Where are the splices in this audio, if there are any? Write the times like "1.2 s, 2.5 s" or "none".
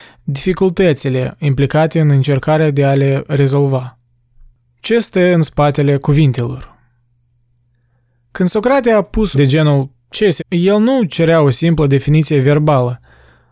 9.3 s, 10.4 s